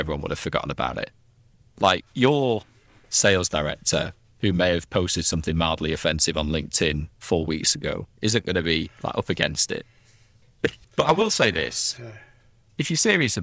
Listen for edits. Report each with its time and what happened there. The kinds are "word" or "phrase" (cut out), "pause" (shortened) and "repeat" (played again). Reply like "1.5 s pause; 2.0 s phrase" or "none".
2.1 s pause; 8.1 s pause